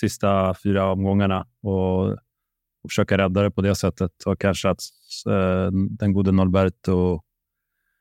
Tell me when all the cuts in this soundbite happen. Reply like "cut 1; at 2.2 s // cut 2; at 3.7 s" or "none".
none